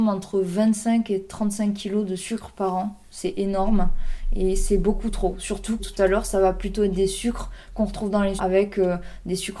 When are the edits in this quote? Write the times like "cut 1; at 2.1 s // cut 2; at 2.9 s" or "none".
cut 1; at 5.8 s // cut 2; at 8.4 s

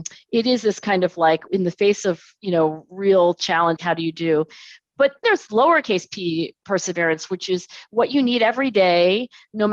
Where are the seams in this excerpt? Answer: cut 1; at 1.5 s // cut 2; at 3.8 s // cut 3; at 5.2 s

